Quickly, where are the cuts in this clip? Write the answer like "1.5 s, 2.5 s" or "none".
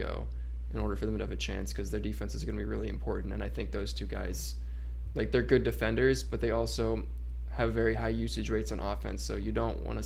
none